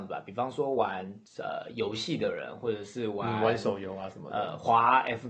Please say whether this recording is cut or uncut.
cut